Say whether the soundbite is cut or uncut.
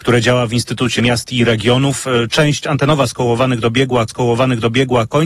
cut